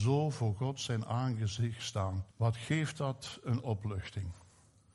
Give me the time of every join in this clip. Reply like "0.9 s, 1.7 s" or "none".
2.3 s